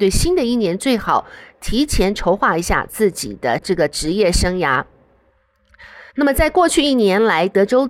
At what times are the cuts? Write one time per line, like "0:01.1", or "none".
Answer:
0:06.1